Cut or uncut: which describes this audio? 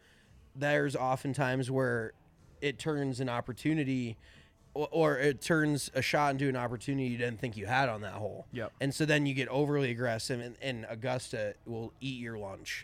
uncut